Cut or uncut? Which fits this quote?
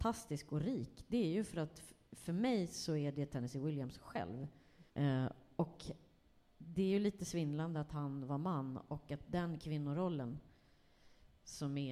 cut